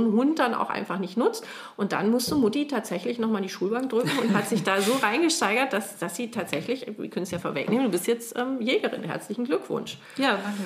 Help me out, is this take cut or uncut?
uncut